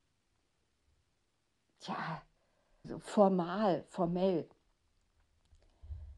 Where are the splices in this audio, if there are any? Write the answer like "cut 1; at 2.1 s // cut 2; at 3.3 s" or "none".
cut 1; at 2.8 s